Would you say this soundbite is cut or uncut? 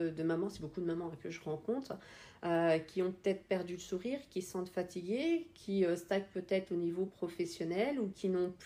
uncut